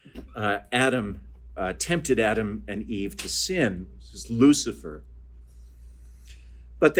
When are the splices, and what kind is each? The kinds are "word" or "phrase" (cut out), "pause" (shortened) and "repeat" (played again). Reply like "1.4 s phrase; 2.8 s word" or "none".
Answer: 1.6 s word